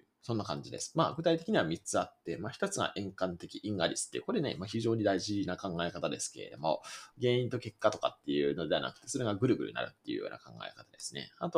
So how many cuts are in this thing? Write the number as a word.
one